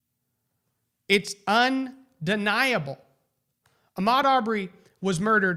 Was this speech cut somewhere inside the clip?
no; 0 cuts

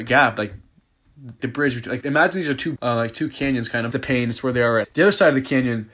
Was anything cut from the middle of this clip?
yes; 5 cuts; at 1.4 s, 2.0 s, 2.8 s, 3.9 s, 4.8 s

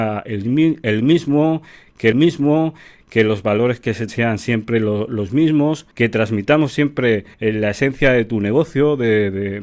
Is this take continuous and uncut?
no; 4 cuts; at 2.1 s, 4.1 s, 5.9 s, 7.3 s

